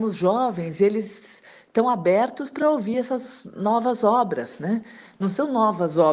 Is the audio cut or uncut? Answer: uncut